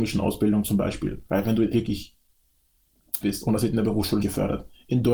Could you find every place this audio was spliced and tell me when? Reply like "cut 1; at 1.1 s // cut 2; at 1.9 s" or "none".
cut 1; at 1.3 s // cut 2; at 1.7 s // cut 3; at 3.2 s // cut 4; at 4.2 s